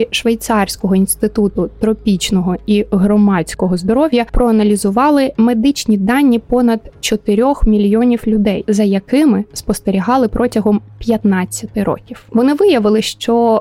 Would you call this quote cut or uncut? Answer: uncut